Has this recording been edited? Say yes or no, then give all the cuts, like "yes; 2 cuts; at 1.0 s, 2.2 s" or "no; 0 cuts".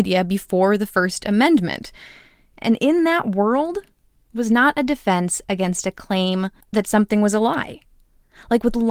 yes; 2 cuts; at 4.2 s, 6.6 s